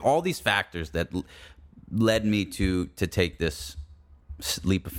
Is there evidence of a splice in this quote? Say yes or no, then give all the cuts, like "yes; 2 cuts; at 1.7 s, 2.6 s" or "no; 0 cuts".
no; 0 cuts